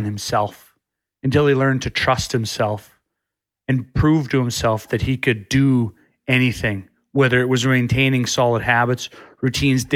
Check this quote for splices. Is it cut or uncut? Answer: uncut